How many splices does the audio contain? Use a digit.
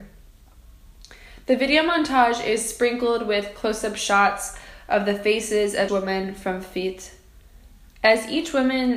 1